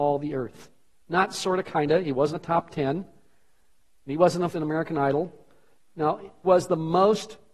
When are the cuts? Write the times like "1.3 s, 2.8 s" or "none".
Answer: 2.3 s, 4.5 s, 6.4 s